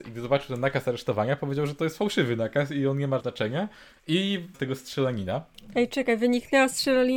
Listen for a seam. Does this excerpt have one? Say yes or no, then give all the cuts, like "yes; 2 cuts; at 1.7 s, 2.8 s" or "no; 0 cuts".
yes; 2 cuts; at 3.2 s, 4.5 s